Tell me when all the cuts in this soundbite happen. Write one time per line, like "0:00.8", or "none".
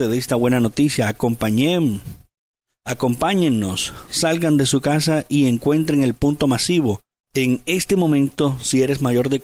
none